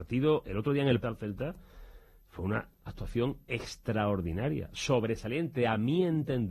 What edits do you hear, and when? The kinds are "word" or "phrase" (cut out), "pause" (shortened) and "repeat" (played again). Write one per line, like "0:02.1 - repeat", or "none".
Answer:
0:01.0 - phrase